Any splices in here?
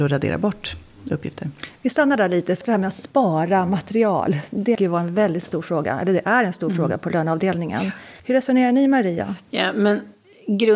yes; 3 cuts; at 2.6 s, 4.7 s, 8.2 s

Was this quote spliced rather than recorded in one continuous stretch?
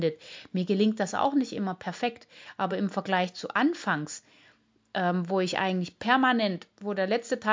no; 0 cuts

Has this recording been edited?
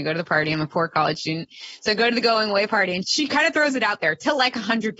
yes; 1 cut; at 3.0 s

